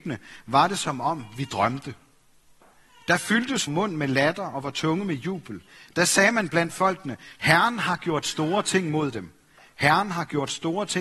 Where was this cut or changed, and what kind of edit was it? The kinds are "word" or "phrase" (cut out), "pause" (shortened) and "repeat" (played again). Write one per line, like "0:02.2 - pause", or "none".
0:03.7 - word